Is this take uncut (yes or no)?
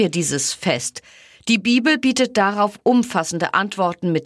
yes